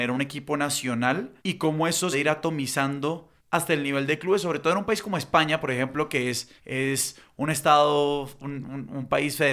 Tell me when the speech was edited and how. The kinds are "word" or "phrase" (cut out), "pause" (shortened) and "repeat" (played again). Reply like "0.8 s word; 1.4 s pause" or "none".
1.4 s pause; 2.1 s phrase; 3.4 s pause; 6.6 s pause